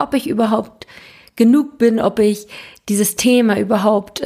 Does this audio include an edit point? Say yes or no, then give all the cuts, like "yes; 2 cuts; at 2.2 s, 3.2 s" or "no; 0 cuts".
no; 0 cuts